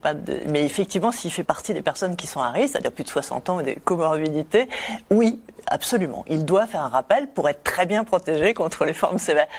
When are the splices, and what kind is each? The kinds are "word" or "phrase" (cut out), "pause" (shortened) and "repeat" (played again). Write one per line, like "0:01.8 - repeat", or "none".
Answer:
0:01.4 - word